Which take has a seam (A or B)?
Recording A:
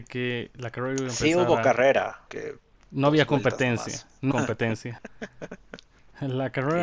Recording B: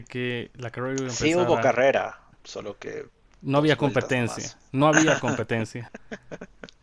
A